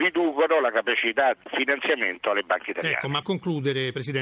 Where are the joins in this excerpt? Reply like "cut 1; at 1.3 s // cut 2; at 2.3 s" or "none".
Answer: cut 1; at 1.4 s // cut 2; at 3.2 s